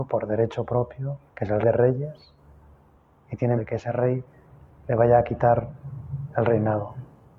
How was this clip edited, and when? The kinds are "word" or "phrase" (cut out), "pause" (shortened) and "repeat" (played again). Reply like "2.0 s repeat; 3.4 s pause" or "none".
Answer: 1.3 s pause; 1.6 s word; 3.6 s word